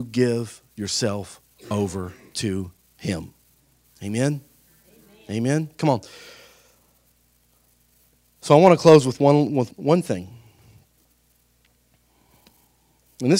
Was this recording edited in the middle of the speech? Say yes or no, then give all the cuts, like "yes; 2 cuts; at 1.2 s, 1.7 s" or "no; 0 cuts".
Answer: yes; 1 cut; at 9.7 s